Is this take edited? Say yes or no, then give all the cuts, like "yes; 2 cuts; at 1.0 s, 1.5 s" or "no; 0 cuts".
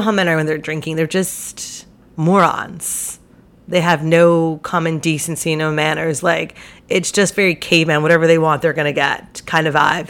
no; 0 cuts